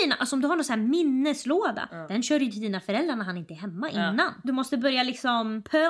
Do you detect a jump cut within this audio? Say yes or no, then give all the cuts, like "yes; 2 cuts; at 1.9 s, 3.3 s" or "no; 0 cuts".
no; 0 cuts